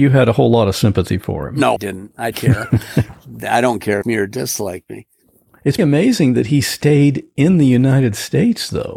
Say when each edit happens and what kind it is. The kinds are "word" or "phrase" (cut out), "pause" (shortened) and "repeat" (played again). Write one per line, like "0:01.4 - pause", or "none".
0:01.8 - word
0:02.3 - word
0:04.0 - phrase
0:05.8 - word